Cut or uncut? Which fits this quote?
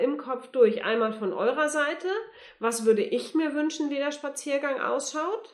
uncut